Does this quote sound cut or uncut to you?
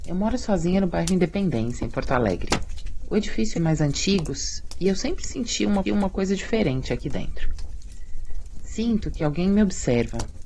cut